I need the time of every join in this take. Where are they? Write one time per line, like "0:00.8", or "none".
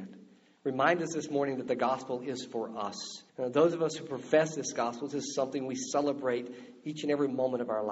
0:03.3